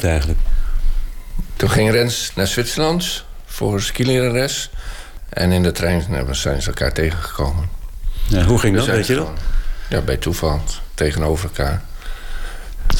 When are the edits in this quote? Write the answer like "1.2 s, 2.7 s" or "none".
2.3 s